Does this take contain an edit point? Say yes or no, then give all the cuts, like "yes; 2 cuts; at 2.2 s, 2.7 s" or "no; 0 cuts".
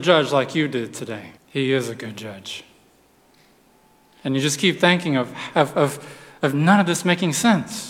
yes; 2 cuts; at 1.4 s, 3.2 s